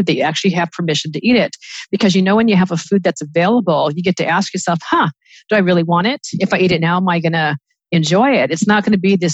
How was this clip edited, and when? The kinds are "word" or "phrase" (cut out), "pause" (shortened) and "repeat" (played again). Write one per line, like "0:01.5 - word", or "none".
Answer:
none